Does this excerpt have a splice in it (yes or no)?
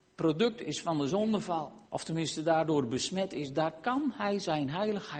yes